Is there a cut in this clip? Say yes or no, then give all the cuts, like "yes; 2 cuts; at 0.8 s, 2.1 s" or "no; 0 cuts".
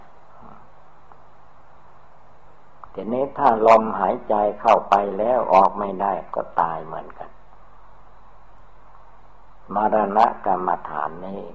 no; 0 cuts